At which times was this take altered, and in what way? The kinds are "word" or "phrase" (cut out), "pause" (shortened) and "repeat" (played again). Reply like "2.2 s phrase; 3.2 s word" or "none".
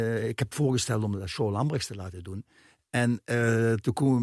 none